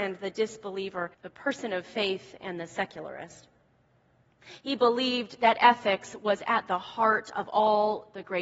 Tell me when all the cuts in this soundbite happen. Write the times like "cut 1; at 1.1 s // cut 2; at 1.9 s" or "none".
cut 1; at 1.1 s